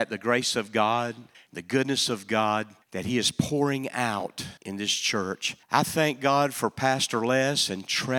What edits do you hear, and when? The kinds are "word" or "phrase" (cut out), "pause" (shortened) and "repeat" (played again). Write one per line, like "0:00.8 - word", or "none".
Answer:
0:01.3 - pause
0:02.8 - pause
0:04.6 - pause
0:05.6 - pause

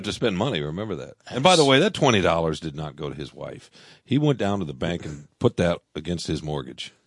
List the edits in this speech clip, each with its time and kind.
0:01.2 - pause

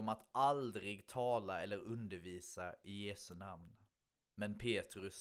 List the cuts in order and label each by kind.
none

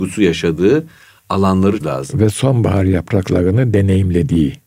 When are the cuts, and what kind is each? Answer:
0:01.8 - word

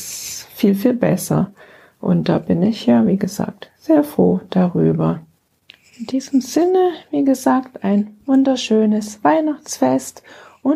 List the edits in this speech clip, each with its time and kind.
none

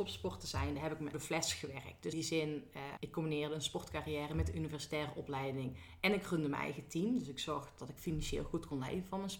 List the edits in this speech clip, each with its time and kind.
0:01.1 - phrase
0:02.1 - word
0:03.0 - word

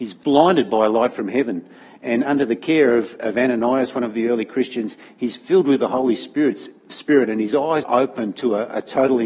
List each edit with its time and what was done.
0:07.8 - word

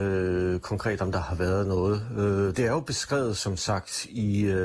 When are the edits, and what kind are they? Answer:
none

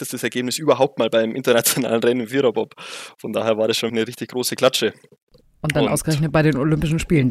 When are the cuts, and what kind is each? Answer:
0:03.9 - word

